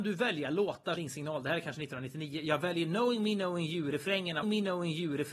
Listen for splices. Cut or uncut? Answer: cut